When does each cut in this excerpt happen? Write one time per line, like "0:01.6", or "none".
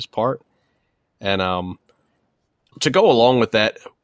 0:02.7